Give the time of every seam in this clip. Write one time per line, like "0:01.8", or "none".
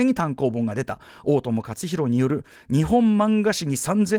none